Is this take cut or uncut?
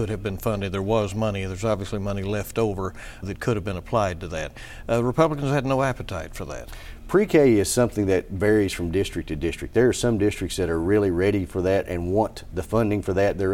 cut